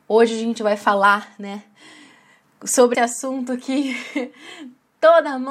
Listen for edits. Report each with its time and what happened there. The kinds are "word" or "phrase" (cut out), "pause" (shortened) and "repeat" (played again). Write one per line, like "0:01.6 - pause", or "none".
0:02.9 - word